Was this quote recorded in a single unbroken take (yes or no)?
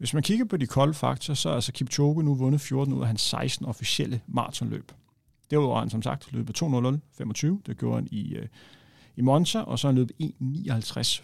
yes